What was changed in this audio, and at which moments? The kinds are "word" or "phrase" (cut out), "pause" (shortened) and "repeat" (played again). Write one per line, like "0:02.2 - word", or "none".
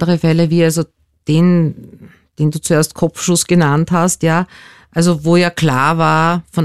none